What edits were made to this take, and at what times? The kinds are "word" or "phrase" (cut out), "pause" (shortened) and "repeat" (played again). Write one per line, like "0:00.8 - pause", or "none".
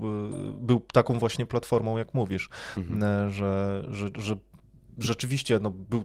none